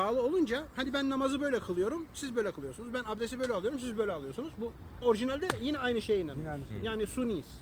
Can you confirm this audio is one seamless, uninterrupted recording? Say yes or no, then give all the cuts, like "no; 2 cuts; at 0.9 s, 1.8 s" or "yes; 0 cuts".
no; 1 cut; at 5.0 s